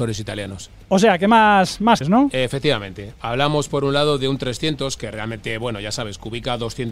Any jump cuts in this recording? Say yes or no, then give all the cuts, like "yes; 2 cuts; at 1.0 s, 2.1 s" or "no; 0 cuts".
yes; 1 cut; at 2.0 s